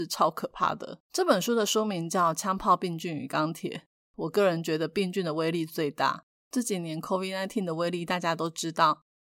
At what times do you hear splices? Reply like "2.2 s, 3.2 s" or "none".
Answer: 1.0 s